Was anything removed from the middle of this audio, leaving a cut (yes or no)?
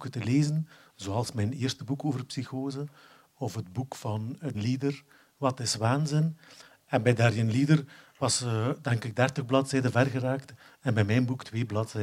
yes